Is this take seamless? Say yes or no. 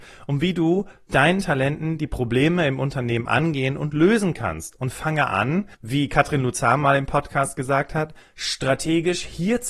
no